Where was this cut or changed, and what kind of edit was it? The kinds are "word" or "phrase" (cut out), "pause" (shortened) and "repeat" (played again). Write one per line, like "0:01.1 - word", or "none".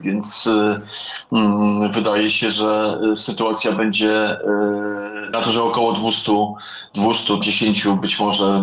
0:05.3 - phrase
0:07.4 - word